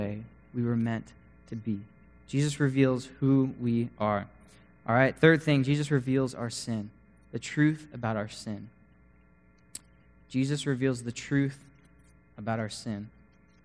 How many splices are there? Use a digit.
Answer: 0